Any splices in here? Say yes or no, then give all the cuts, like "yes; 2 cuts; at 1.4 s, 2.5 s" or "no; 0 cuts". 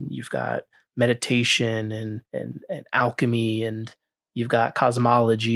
yes; 1 cut; at 2.3 s